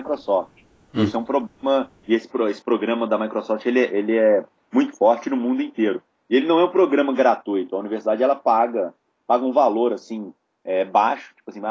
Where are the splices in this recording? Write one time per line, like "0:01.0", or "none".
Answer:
none